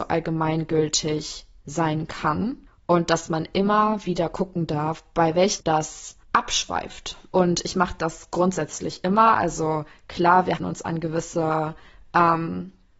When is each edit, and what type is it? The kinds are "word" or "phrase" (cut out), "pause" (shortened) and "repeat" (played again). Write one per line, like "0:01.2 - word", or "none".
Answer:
0:02.7 - pause
0:05.6 - word
0:06.2 - pause
0:10.6 - word